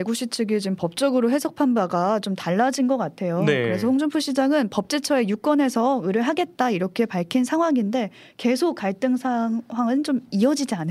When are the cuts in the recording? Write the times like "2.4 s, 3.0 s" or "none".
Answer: none